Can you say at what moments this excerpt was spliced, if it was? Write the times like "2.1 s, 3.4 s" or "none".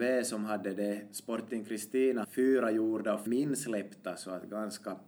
2.2 s, 3.3 s

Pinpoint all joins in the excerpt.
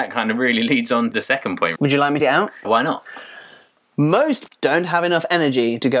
1.1 s, 1.8 s, 2.2 s, 2.6 s, 4.5 s

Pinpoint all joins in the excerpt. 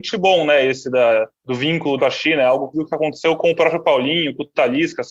1.3 s, 2.0 s, 2.7 s

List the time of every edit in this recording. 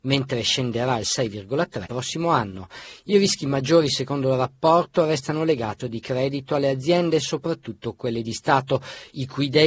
1.9 s, 5.8 s

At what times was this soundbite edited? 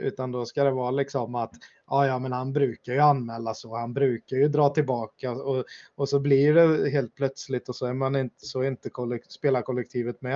none

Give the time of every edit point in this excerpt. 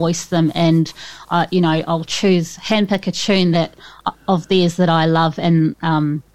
none

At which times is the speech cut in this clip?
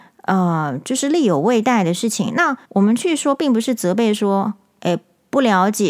2.6 s

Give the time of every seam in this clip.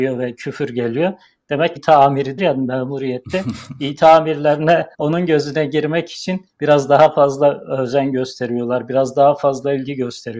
1.8 s, 2.4 s, 4.9 s, 6.5 s

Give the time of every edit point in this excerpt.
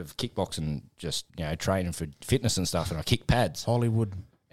1.3 s

